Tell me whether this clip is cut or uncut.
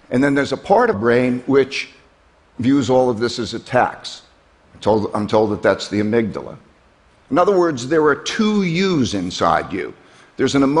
cut